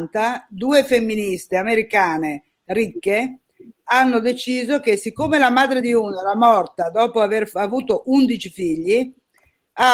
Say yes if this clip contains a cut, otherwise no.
no